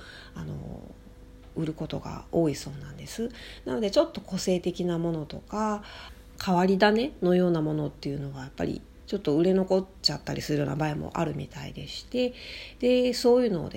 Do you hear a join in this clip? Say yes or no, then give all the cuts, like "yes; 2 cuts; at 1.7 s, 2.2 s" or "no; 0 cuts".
no; 0 cuts